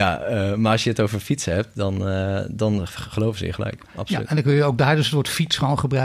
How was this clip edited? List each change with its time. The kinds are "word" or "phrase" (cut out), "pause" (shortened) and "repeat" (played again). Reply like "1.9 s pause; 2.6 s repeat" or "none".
none